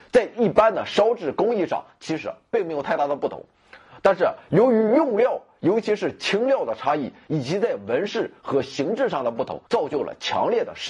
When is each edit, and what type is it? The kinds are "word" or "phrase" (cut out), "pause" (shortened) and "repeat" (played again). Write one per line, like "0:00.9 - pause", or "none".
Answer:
0:09.7 - pause